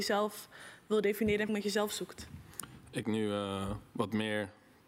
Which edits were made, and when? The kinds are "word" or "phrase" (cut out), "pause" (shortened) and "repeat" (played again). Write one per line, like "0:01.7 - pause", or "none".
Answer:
0:01.5 - word
0:03.0 - phrase